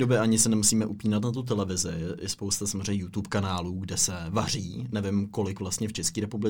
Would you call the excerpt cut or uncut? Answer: uncut